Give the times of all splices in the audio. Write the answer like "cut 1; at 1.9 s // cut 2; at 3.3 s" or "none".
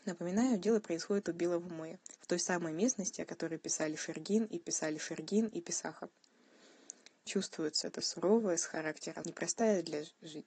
cut 1; at 2.2 s // cut 2; at 4.6 s // cut 3; at 7.3 s // cut 4; at 9.2 s